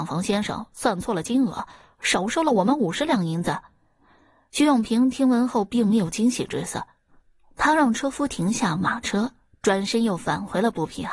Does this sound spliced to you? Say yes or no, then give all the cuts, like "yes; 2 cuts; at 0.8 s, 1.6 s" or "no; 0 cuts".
no; 0 cuts